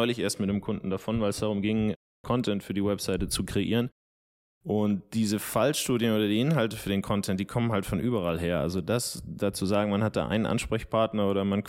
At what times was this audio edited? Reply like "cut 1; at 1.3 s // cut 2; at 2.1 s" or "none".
none